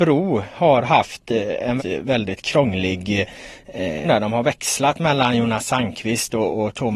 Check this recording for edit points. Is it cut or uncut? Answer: cut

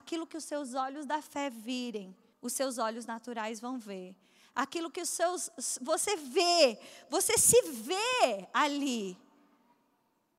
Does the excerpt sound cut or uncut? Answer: cut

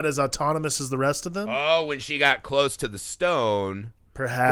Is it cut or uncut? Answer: uncut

